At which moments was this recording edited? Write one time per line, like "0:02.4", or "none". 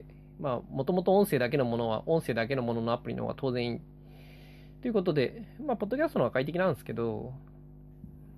none